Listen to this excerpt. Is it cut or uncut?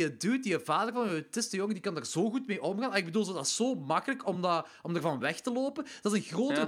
uncut